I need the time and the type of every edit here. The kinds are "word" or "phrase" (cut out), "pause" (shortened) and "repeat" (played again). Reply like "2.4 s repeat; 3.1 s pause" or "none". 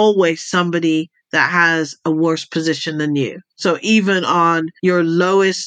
4.8 s pause